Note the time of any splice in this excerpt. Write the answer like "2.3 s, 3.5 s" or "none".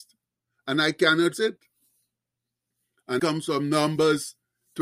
1.3 s, 3.2 s